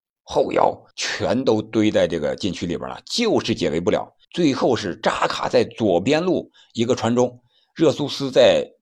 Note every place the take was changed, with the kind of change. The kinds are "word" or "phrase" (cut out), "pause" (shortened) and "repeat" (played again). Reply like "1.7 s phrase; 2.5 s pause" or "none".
0.9 s pause; 4.2 s pause